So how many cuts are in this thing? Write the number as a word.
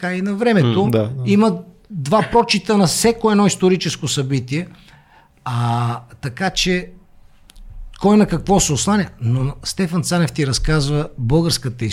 zero